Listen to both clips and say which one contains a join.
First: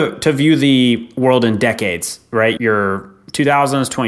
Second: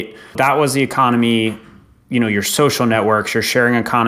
first; 1 cut; at 2.6 s

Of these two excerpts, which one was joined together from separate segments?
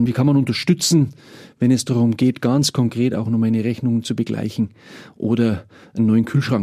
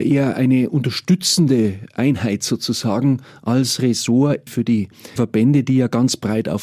second; 2 cuts; at 4.5 s, 5.2 s

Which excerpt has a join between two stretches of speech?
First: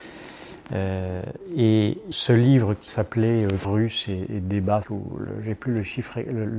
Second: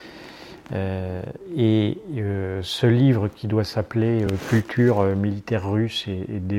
first; 4 cuts; at 2.1 s, 2.9 s, 3.6 s, 4.8 s

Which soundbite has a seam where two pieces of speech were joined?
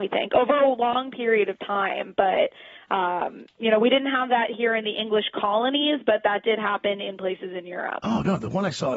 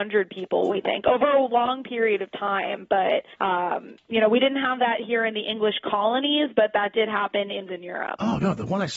second; 2 cuts; at 3.3 s, 7.7 s

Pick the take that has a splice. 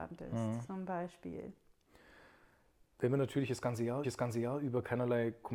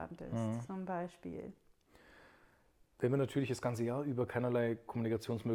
first; 1 cut; at 4.0 s

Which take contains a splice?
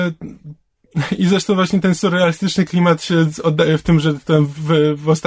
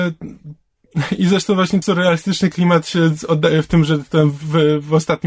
second; 1 cut; at 1.8 s

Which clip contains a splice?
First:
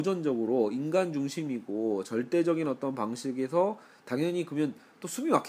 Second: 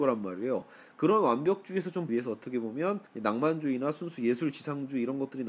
second; 2 cuts; at 2.1 s, 3.1 s

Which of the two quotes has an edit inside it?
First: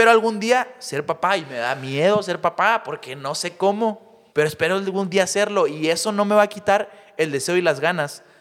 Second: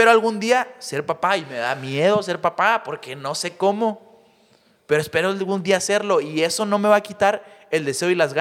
first; 1 cut; at 4.3 s

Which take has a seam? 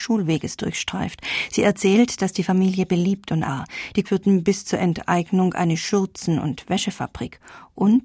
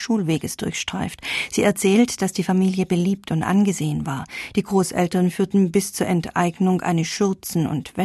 first; 2 cuts; at 3.5 s, 4.0 s

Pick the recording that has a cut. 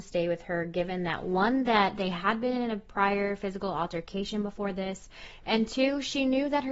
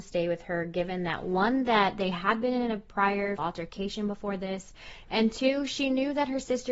second; 1 cut; at 3.4 s

